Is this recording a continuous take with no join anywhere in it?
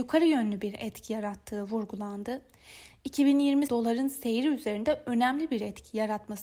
no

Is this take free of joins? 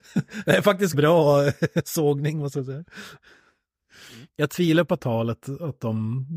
no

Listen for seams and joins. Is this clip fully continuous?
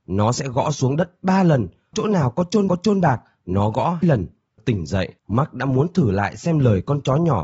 no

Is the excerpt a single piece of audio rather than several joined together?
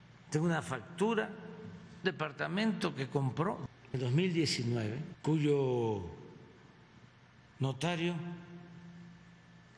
no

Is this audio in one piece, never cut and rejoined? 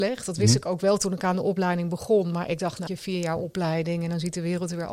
no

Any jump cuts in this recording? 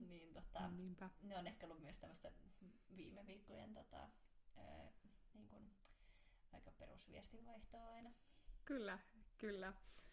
no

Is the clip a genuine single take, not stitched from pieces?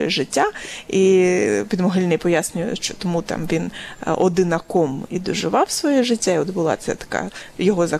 yes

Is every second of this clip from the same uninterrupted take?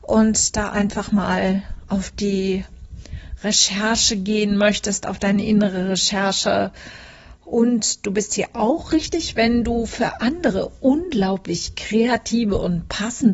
yes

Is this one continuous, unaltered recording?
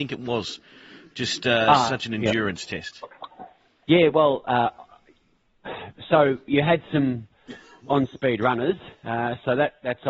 yes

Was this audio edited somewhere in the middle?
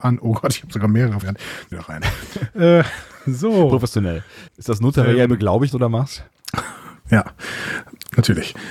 yes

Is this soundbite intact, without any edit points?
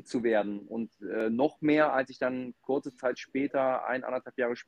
yes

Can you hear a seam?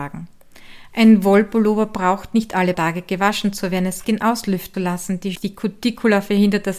yes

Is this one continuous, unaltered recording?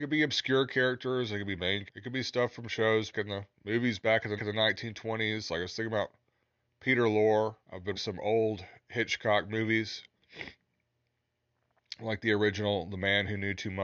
no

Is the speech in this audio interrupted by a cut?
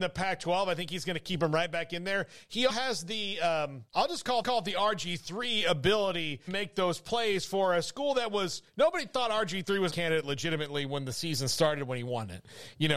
yes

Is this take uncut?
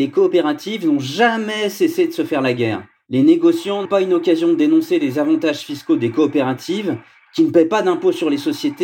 no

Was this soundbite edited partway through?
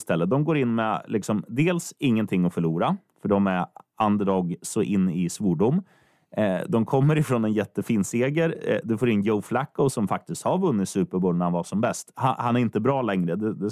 no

